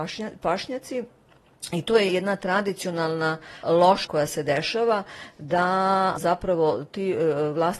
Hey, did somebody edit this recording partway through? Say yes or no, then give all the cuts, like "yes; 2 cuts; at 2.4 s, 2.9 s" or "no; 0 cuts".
yes; 4 cuts; at 2.1 s, 3.6 s, 4.0 s, 6.2 s